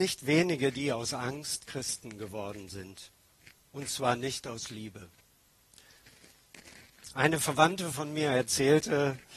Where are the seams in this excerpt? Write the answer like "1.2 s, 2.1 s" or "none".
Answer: none